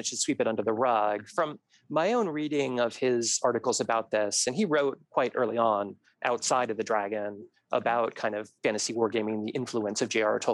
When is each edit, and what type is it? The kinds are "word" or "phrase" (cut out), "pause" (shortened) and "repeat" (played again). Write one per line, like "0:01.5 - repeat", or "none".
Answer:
none